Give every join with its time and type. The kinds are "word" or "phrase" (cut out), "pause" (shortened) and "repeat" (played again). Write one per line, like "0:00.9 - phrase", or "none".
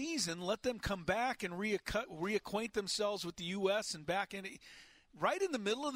none